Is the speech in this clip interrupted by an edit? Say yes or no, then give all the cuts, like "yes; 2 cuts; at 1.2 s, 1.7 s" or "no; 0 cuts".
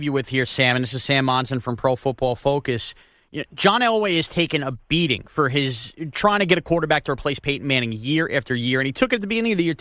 no; 0 cuts